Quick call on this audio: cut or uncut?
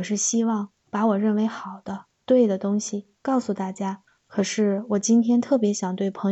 cut